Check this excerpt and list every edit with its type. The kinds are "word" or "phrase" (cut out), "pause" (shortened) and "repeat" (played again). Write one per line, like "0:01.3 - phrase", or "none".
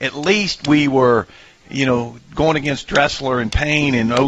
none